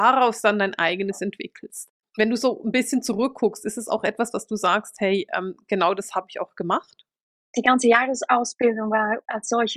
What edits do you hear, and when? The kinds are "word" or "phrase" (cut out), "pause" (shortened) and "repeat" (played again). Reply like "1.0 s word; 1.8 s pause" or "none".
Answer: none

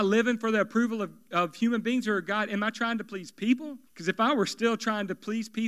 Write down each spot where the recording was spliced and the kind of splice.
3.9 s pause

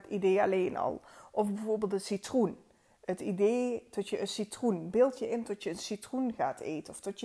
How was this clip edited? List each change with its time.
none

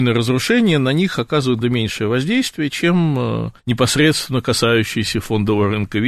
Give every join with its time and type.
1.6 s word; 3.6 s pause

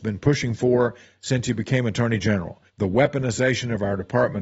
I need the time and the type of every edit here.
2.7 s pause

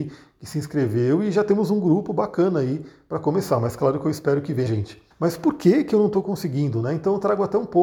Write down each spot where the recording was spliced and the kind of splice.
4.7 s word; 5.1 s pause

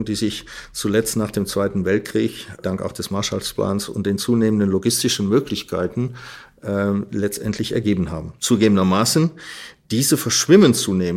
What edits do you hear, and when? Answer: 2.6 s word; 8.4 s pause

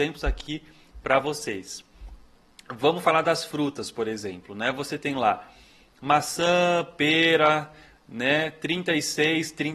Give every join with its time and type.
none

